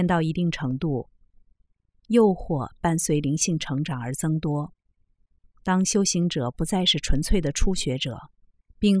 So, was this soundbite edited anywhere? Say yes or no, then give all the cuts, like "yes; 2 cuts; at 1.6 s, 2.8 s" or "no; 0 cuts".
no; 0 cuts